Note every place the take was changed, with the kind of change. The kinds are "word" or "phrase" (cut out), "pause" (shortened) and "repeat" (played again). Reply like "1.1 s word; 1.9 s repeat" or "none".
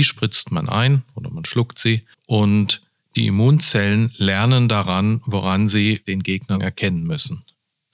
2.1 s pause